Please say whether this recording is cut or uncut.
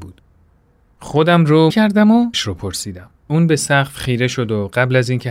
cut